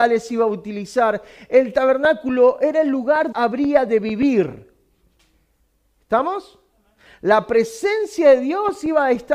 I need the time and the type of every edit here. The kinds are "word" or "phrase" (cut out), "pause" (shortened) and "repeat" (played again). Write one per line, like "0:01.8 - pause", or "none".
0:03.3 - phrase